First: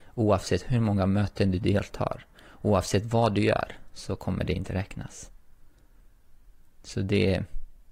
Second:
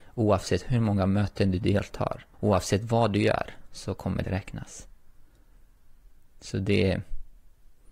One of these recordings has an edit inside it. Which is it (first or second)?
second